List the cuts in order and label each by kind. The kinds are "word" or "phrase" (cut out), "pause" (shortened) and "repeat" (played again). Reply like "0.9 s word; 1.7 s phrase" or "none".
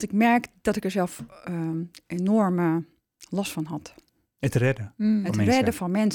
none